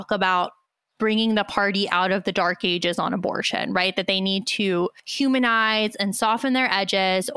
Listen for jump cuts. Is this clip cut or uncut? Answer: uncut